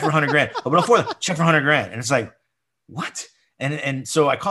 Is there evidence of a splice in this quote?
no; 0 cuts

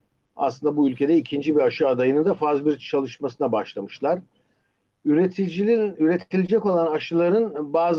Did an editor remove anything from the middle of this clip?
no; 0 cuts

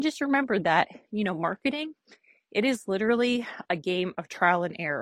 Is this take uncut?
yes; 0 cuts

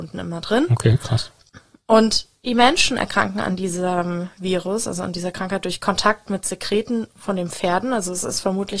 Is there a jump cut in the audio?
no; 0 cuts

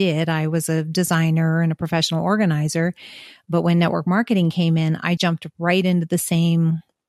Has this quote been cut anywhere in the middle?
yes; 1 cut; at 5.2 s

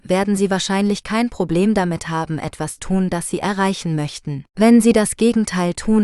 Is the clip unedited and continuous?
no; 2 cuts; at 2.8 s, 4.5 s

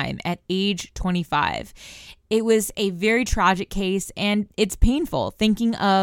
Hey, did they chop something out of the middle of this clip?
yes; 1 cut; at 4.5 s

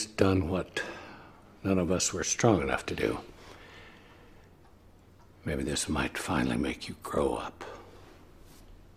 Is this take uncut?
yes; 0 cuts

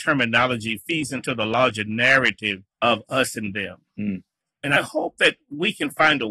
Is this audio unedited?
no; 2 cuts; at 2.7 s, 4.4 s

